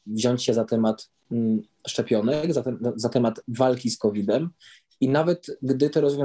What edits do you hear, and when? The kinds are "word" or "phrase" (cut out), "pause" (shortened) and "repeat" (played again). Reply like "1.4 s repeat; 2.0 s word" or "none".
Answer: none